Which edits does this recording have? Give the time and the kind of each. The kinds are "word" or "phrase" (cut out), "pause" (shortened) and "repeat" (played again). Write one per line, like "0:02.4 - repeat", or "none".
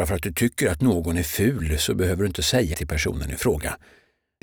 0:02.7 - word